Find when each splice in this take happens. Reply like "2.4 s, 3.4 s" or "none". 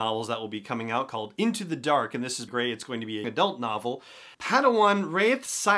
2.5 s, 3.2 s, 4.3 s